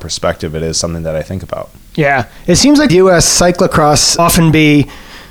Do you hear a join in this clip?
yes; 2 cuts; at 2.9 s, 4.2 s

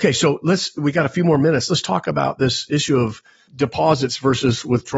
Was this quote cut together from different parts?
no; 0 cuts

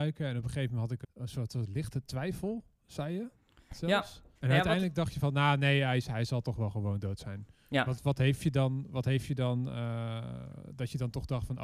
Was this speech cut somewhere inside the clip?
yes; 3 cuts; at 1.0 s, 4.4 s, 8.0 s

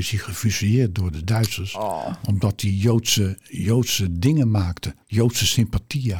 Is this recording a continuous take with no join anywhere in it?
no; 1 cut; at 5.0 s

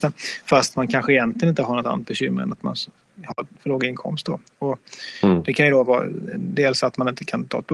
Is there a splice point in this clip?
no; 0 cuts

